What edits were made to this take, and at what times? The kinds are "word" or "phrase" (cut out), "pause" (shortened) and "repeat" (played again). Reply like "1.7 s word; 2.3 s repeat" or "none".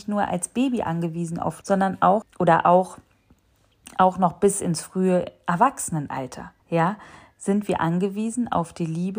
1.6 s word; 2.2 s word; 6.6 s pause